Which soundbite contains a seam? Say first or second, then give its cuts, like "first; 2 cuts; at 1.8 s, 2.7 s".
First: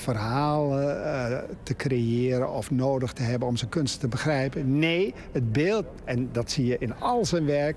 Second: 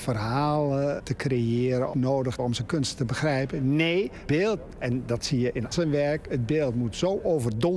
second; 5 cuts; at 1.0 s, 1.9 s, 2.4 s, 4.3 s, 5.7 s